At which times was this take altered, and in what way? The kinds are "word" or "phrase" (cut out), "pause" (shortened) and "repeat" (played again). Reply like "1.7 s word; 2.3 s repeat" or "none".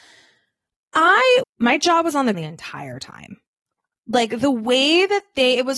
1.4 s word; 2.3 s word